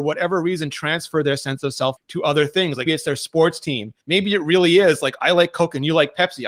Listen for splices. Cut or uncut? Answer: cut